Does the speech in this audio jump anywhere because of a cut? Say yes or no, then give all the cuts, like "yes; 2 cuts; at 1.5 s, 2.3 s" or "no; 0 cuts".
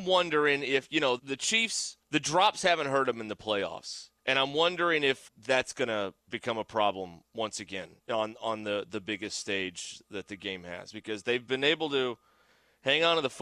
yes; 5 cuts; at 1.2 s, 2.0 s, 5.3 s, 7.3 s, 8.0 s